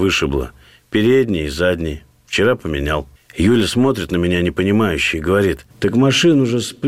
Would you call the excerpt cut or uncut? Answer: cut